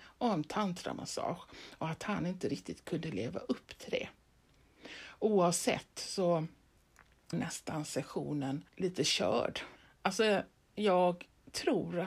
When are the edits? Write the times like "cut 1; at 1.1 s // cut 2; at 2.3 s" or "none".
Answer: cut 1; at 7.3 s // cut 2; at 8.7 s // cut 3; at 9.8 s